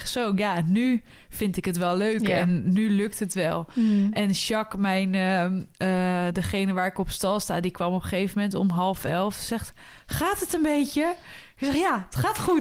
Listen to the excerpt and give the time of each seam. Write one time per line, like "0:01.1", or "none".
none